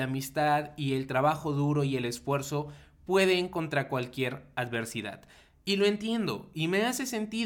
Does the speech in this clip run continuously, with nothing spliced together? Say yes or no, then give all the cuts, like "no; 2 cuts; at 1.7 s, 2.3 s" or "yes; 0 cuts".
yes; 0 cuts